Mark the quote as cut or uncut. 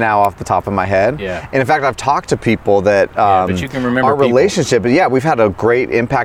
uncut